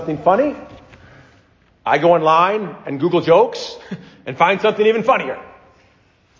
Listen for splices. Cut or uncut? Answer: uncut